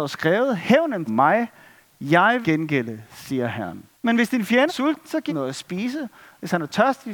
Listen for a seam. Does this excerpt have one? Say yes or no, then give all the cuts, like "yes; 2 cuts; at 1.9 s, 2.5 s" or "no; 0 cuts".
yes; 5 cuts; at 1.1 s, 2.4 s, 3.9 s, 4.7 s, 5.3 s